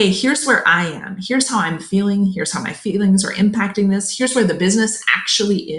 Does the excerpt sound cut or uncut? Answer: uncut